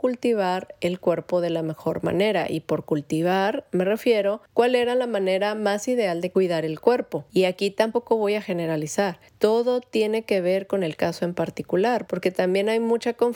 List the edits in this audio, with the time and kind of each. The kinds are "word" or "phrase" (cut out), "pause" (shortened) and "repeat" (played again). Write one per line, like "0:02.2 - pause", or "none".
none